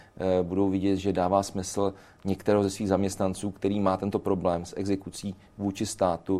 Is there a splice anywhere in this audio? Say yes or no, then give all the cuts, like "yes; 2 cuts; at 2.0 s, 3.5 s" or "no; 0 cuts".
no; 0 cuts